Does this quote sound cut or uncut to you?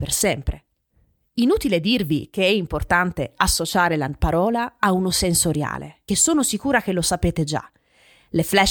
cut